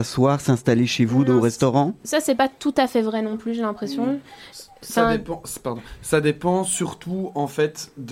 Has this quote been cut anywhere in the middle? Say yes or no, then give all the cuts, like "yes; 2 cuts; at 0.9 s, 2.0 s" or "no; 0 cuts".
no; 0 cuts